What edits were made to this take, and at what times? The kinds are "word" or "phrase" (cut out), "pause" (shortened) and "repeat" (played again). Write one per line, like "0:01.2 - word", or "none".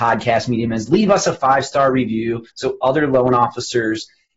0:02.5 - pause